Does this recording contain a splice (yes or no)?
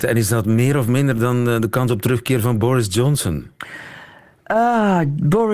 no